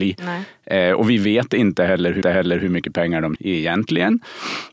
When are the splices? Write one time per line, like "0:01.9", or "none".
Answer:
0:02.2
0:03.4